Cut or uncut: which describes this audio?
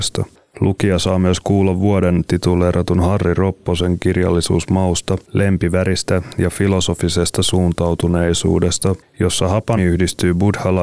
cut